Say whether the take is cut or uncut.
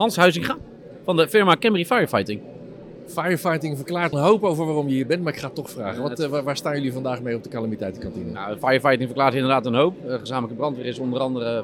cut